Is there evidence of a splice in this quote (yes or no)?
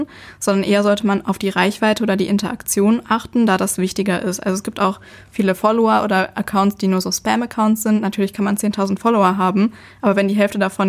no